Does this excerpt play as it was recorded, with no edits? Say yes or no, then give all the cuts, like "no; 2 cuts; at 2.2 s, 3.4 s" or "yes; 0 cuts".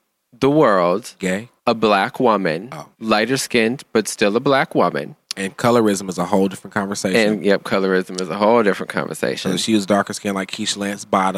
no; 3 cuts; at 1.6 s, 2.9 s, 5.2 s